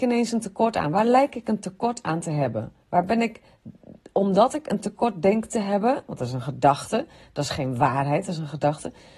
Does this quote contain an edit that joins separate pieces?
no; 0 cuts

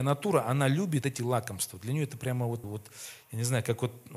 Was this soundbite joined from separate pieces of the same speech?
yes; 2 cuts; at 1.0 s, 2.6 s

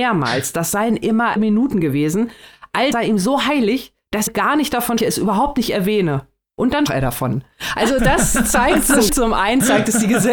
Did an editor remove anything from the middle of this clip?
yes; 7 cuts; at 1.4 s, 2.9 s, 4.3 s, 5.0 s, 6.9 s, 8.0 s, 9.1 s

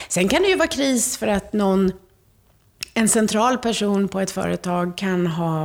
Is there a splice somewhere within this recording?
no; 0 cuts

